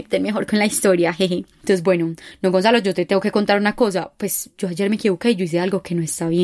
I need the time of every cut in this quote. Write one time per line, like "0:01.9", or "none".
none